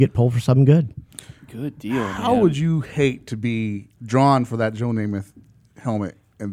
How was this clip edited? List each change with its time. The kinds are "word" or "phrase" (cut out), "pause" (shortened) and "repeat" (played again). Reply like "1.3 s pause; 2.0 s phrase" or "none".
3.9 s pause